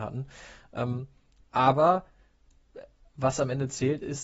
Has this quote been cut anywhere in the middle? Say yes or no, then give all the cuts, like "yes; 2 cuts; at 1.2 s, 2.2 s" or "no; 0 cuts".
no; 0 cuts